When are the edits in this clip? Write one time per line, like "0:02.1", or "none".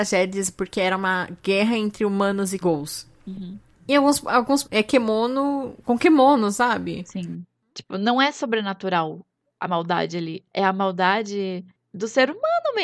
0:02.6
0:04.6